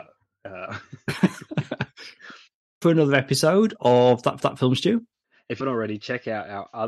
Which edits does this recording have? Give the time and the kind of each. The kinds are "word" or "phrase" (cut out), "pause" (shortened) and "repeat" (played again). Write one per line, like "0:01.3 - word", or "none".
0:02.8 - phrase
0:04.4 - repeat
0:05.2 - pause
0:05.6 - word